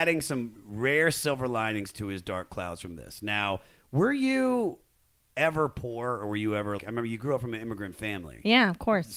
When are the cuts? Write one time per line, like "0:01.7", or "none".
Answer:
0:06.8

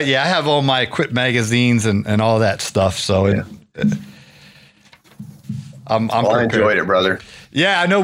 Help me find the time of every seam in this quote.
none

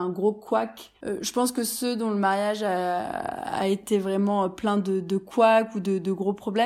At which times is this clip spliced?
0:01.0

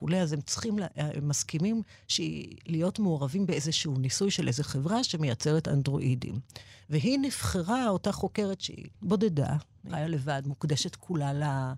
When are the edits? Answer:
0:08.9

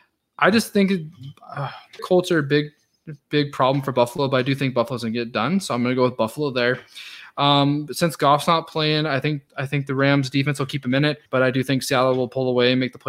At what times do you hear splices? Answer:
0:02.0
0:09.5
0:11.3

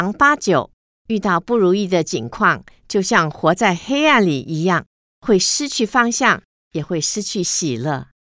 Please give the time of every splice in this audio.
none

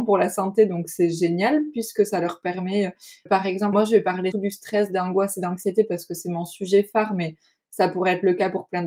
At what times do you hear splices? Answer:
0:03.3
0:03.7
0:04.3

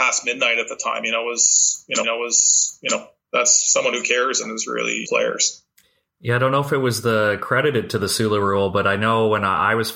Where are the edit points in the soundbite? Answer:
0:02.0
0:05.1

